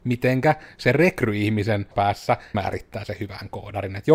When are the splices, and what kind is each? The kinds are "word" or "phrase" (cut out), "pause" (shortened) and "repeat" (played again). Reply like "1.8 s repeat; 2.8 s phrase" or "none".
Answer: 1.9 s word; 2.5 s word